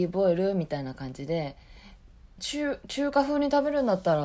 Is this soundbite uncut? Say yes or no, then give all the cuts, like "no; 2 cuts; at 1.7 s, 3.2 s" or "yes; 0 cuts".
no; 1 cut; at 2.4 s